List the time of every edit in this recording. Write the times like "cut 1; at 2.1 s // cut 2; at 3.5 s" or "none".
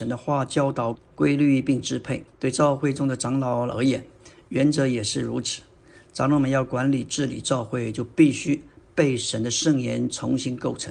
cut 1; at 1.0 s // cut 2; at 2.3 s